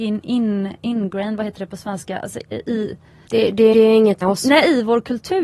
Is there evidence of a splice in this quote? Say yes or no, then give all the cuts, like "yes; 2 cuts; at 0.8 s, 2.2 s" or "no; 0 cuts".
yes; 3 cuts; at 2.5 s, 3.7 s, 4.2 s